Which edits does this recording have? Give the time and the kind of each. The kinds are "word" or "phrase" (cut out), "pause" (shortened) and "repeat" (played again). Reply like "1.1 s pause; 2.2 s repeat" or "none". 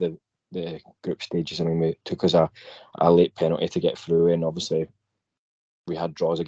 none